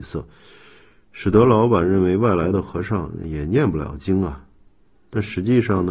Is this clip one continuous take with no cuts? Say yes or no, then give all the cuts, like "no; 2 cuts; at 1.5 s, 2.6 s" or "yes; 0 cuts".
yes; 0 cuts